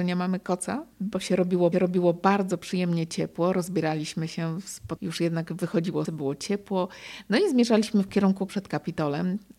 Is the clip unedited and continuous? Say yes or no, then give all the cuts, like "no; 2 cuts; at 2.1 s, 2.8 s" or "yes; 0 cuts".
no; 5 cuts; at 0.9 s, 1.7 s, 5.0 s, 6.1 s, 8.5 s